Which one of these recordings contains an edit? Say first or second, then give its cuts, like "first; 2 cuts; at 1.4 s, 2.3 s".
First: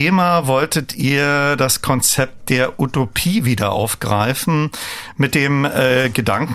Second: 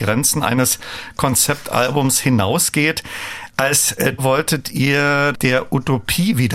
second; 2 cuts; at 4.2 s, 5.3 s